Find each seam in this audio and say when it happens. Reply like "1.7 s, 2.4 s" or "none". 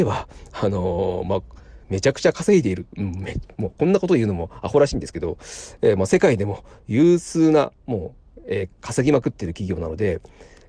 1.8 s